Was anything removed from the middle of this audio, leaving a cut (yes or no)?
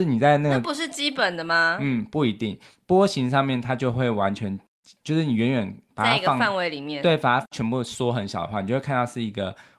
no